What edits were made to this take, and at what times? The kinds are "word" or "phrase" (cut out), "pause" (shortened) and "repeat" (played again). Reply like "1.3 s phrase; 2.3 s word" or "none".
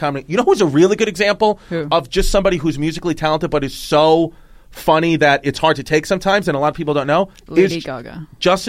none